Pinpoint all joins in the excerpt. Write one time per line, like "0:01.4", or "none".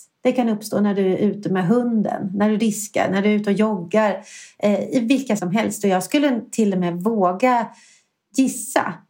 0:05.4